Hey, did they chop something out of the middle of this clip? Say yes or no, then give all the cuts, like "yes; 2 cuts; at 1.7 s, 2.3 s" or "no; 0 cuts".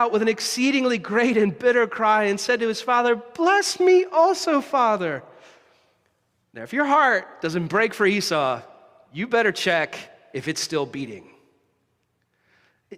no; 0 cuts